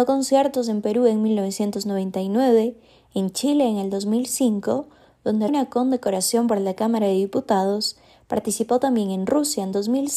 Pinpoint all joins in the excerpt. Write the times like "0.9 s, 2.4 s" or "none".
5.5 s